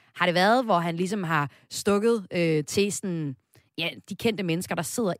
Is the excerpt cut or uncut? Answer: uncut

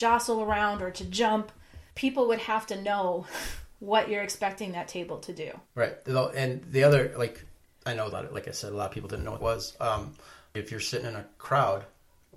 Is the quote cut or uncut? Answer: cut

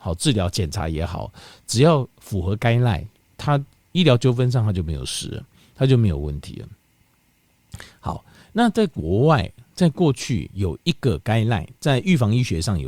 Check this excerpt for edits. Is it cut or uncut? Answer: uncut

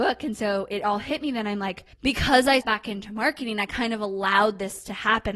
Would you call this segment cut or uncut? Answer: cut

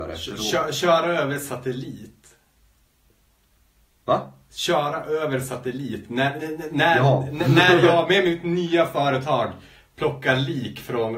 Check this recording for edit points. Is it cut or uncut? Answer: uncut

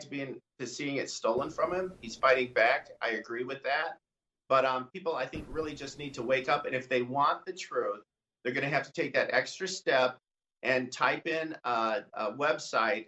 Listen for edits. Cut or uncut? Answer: uncut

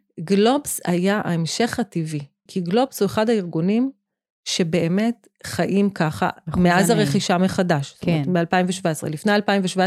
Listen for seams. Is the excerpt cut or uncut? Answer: cut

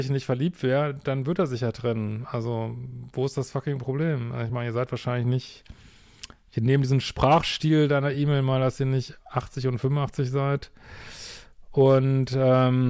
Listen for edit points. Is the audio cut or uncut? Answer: uncut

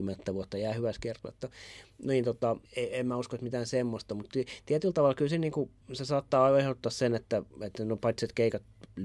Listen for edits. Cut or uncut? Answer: cut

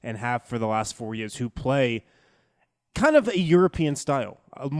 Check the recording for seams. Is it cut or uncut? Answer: uncut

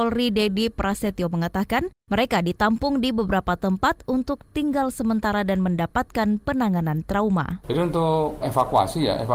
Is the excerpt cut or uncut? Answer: uncut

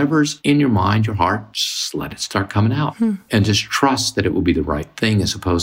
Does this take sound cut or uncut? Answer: uncut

